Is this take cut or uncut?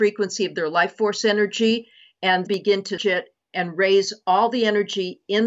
cut